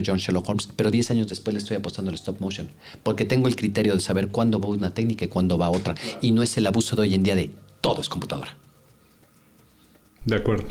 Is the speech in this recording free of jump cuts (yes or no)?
yes